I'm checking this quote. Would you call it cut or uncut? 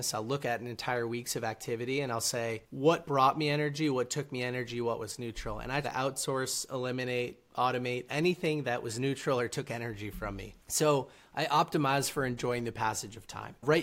cut